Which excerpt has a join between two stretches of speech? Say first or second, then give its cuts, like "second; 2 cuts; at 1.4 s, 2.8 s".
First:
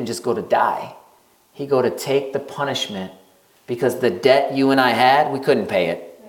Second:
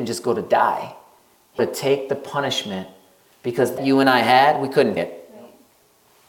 second; 3 cuts; at 1.6 s, 3.8 s, 5.0 s